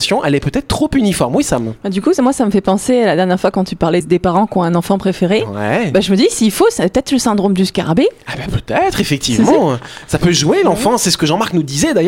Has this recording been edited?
yes; 1 cut; at 4.0 s

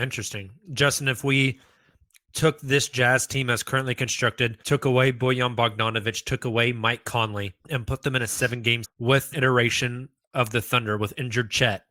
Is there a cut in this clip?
yes; 4 cuts; at 4.6 s, 7.6 s, 8.8 s, 9.3 s

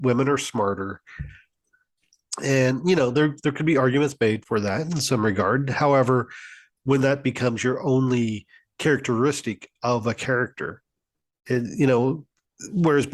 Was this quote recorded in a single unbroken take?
no; 1 cut; at 4.4 s

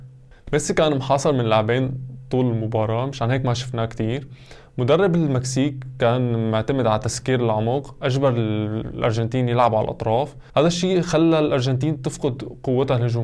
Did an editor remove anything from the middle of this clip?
yes; 1 cut; at 10.5 s

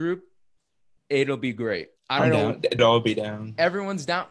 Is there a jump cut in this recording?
yes; 2 cuts; at 2.0 s, 2.8 s

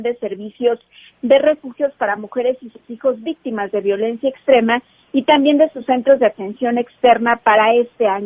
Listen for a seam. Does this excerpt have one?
no; 0 cuts

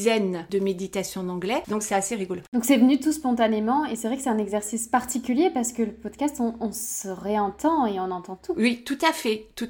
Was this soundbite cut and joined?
no; 0 cuts

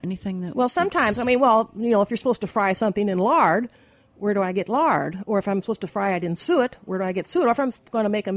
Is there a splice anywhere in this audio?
no; 0 cuts

